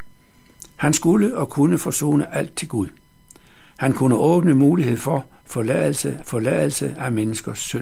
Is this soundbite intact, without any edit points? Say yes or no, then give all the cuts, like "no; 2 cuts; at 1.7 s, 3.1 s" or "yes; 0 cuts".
no; 1 cut; at 6.2 s